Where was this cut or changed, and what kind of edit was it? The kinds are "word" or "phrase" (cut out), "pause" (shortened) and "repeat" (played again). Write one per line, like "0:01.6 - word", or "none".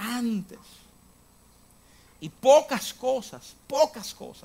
none